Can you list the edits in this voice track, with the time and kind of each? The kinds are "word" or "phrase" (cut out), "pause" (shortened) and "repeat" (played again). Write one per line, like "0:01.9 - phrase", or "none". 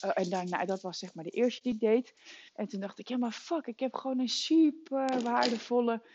0:02.5 - pause